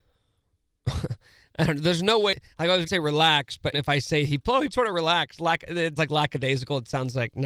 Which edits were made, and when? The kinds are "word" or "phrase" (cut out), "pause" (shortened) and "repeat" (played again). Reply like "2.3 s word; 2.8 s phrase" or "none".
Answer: 2.9 s word; 3.7 s word; 4.7 s word; 6.0 s word